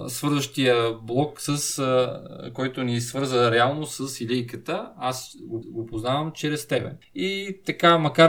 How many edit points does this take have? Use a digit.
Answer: 1